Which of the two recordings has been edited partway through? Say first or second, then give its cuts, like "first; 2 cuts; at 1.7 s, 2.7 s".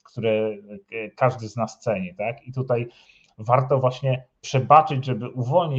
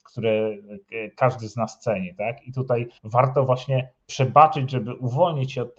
second; 1 cut; at 3.0 s